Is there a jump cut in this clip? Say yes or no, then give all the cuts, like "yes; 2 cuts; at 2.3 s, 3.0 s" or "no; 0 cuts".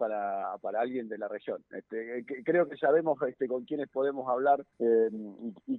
yes; 1 cut; at 4.7 s